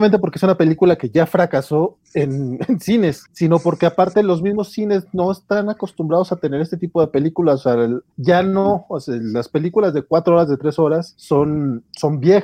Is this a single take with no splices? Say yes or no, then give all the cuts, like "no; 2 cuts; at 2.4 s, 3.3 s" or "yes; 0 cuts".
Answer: yes; 0 cuts